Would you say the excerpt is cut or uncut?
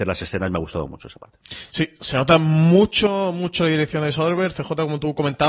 uncut